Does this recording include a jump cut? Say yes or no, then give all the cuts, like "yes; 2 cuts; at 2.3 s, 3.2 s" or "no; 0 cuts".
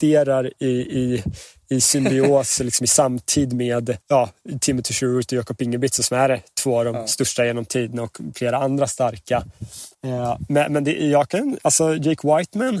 yes; 2 cuts; at 4.0 s, 9.9 s